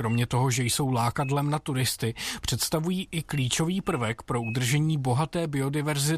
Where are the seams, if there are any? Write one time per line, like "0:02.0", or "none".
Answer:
none